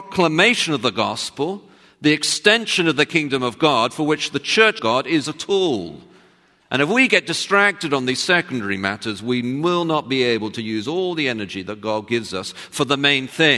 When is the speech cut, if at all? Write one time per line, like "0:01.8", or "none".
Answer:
0:04.8